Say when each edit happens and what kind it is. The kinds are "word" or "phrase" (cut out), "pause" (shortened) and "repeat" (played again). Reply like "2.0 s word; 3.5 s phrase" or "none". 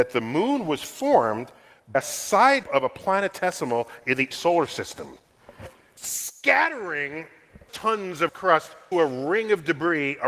1.9 s word; 2.6 s word; 4.3 s word; 6.0 s word; 7.7 s word; 8.3 s word; 8.9 s word